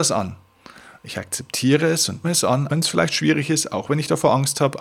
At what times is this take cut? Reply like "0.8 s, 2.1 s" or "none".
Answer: 2.2 s, 2.7 s